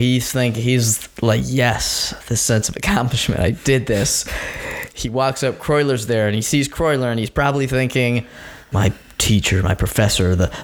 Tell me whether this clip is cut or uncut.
uncut